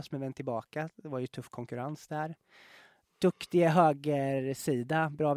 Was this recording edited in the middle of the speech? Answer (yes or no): no